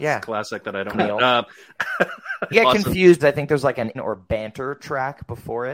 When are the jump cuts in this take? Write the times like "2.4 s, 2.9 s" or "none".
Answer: 0.9 s, 2.5 s, 3.2 s, 3.9 s